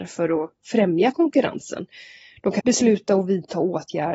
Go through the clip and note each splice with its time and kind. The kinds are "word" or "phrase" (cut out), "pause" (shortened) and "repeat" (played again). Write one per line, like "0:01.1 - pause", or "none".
0:02.6 - word